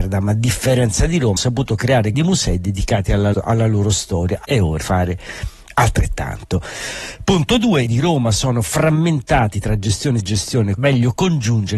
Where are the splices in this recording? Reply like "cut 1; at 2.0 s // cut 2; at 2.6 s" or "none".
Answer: cut 1; at 1.4 s // cut 2; at 2.1 s // cut 3; at 3.3 s // cut 4; at 4.4 s // cut 5; at 4.8 s // cut 6; at 7.9 s // cut 7; at 10.2 s // cut 8; at 10.8 s